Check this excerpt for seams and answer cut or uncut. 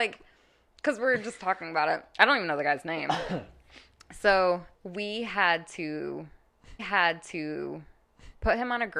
cut